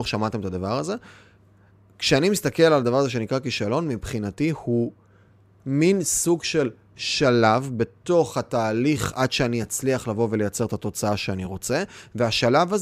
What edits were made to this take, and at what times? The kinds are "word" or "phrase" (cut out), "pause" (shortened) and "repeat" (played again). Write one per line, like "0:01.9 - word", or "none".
none